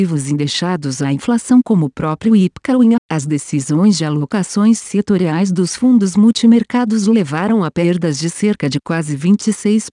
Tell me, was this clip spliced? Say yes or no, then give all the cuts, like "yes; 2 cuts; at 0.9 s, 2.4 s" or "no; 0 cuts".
yes; 1 cut; at 3.0 s